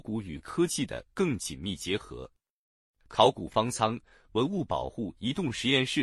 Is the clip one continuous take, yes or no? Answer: yes